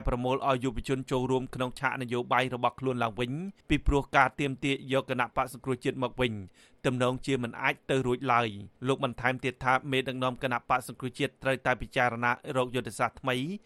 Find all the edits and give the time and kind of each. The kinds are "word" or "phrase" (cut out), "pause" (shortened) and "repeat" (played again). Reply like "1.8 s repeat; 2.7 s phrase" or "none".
3.6 s pause; 8.8 s pause